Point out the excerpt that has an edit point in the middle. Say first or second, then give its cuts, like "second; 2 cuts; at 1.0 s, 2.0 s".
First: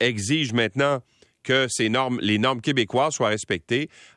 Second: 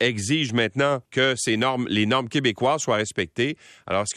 second; 1 cut; at 1.0 s